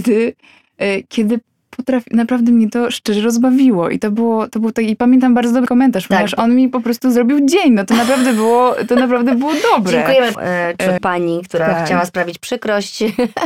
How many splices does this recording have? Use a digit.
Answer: 3